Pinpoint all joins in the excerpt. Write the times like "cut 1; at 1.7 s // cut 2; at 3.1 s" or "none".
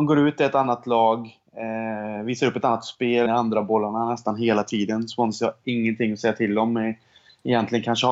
cut 1; at 3.3 s